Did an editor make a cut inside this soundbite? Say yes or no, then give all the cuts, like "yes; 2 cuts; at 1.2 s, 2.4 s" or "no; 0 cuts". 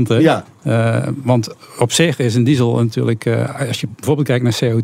no; 0 cuts